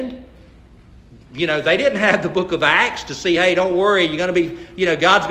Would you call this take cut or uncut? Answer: uncut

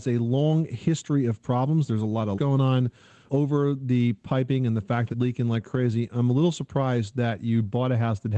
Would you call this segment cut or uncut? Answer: cut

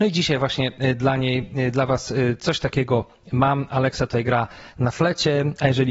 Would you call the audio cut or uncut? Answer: uncut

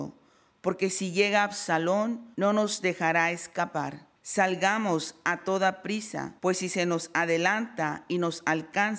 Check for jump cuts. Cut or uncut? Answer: cut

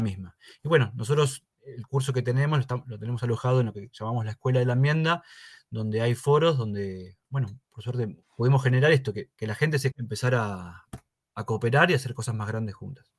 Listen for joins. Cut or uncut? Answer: cut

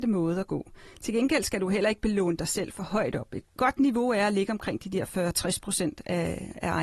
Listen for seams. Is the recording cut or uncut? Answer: uncut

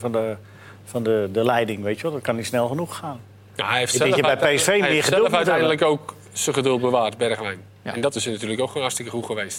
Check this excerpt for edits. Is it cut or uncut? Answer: uncut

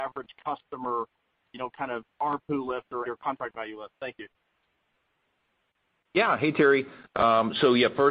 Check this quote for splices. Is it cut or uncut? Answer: cut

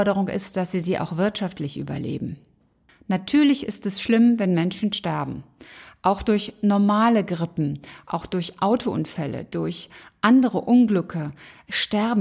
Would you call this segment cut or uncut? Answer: uncut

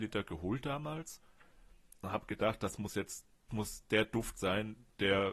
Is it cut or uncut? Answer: cut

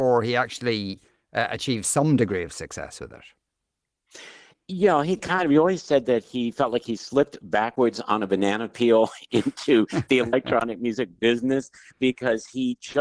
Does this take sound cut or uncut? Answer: uncut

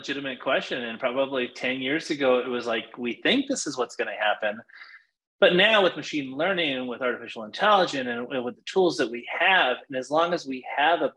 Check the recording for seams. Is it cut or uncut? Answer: uncut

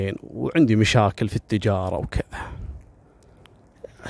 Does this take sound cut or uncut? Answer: uncut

